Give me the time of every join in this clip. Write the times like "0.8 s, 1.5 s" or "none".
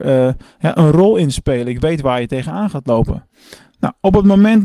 none